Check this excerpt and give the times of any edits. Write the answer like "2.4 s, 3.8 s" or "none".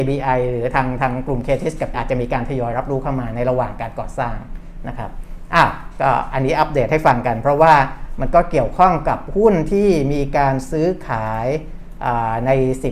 1.9 s